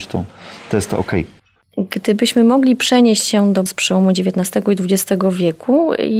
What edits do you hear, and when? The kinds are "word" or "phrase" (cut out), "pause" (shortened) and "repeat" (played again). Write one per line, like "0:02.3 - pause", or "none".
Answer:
0:03.7 - word